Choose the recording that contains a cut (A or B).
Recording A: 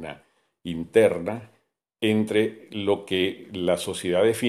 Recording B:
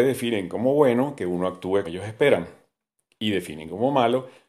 B